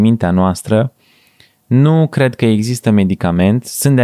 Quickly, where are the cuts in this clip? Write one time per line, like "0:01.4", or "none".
none